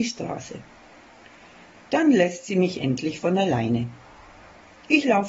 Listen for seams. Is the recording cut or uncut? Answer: uncut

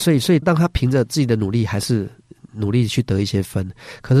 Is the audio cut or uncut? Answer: uncut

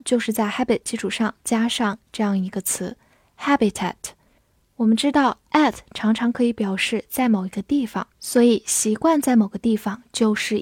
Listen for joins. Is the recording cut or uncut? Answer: cut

